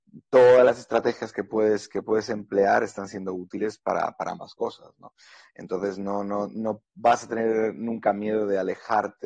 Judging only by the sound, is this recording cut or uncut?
uncut